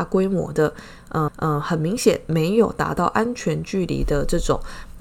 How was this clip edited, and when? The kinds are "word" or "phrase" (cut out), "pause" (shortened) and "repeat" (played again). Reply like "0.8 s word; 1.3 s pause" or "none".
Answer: 1.3 s repeat